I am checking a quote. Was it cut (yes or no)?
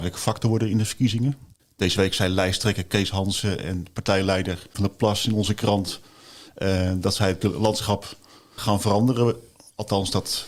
yes